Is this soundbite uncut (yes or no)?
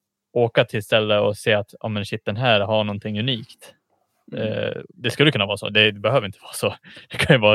yes